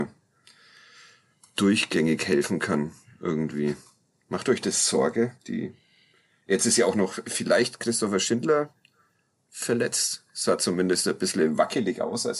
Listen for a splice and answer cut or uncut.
cut